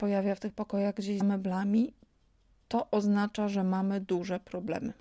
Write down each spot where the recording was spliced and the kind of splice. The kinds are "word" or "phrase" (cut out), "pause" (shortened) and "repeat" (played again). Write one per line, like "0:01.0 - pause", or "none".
0:01.2 - word